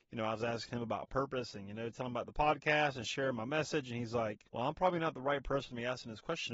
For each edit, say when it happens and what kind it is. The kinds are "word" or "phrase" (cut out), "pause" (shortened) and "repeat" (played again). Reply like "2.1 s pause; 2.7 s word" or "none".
4.5 s pause